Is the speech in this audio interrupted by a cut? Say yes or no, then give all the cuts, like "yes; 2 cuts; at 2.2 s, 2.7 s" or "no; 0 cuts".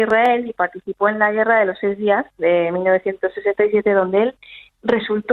no; 0 cuts